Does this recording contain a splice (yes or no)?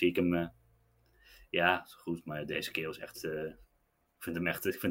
no